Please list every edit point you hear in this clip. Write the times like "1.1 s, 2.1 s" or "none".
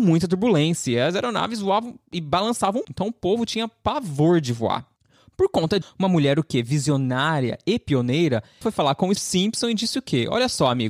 2.8 s, 5.8 s, 8.6 s, 9.2 s